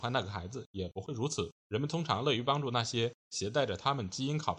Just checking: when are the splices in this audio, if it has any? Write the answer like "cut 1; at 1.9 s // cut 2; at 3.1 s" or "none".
cut 1; at 1.6 s